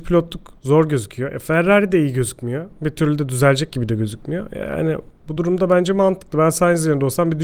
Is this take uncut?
yes; 0 cuts

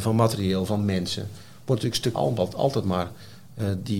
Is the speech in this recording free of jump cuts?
no; 1 cut; at 2.1 s

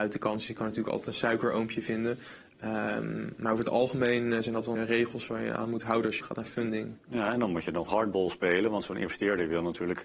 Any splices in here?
yes; 3 cuts; at 4.8 s, 6.2 s, 7.9 s

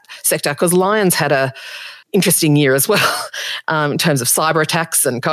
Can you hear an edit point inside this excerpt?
yes; 1 cut; at 2.0 s

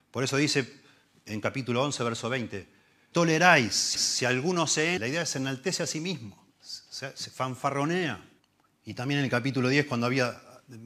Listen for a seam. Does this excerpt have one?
yes; 5 cuts; at 3.1 s, 3.9 s, 5.0 s, 6.5 s, 8.4 s

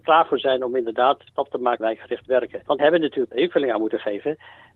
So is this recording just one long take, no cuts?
no; 4 cuts; at 1.3 s, 1.8 s, 2.8 s, 3.3 s

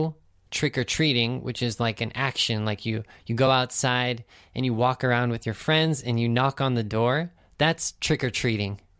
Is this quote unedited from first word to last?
yes; 0 cuts

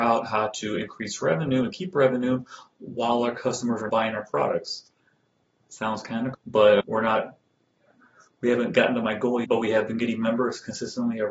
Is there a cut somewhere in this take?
yes; 4 cuts; at 3.9 s, 6.3 s, 6.8 s, 9.4 s

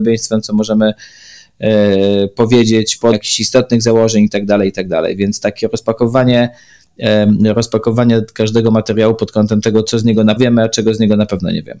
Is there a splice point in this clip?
yes; 2 cuts; at 3.1 s, 10.4 s

